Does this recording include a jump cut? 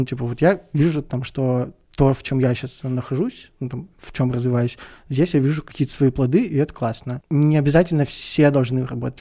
no; 0 cuts

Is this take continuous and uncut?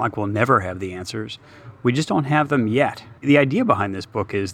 no; 1 cut; at 3.2 s

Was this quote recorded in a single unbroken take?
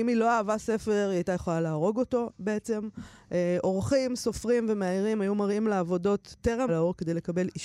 no; 1 cut; at 6.7 s

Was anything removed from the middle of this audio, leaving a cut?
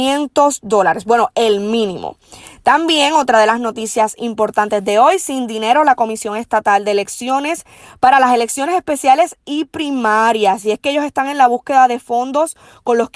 no; 0 cuts

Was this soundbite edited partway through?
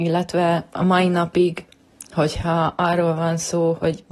no; 0 cuts

